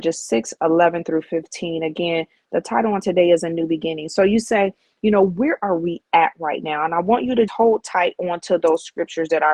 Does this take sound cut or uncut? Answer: cut